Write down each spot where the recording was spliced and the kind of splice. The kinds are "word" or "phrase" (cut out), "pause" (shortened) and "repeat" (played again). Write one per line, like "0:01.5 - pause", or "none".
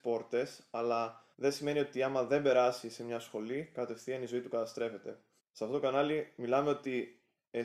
0:01.3 - pause
0:05.4 - pause